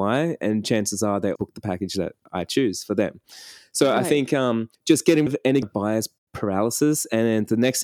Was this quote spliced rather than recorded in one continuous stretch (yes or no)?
yes